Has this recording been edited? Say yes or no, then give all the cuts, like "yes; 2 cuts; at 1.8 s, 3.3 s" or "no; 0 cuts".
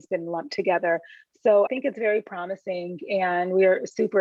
yes; 1 cut; at 1.7 s